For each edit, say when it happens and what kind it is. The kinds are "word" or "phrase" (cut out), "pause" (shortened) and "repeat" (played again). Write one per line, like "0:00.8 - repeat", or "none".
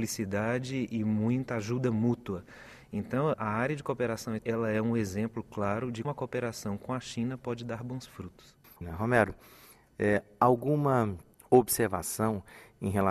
0:03.3 - word
0:04.4 - word
0:06.0 - word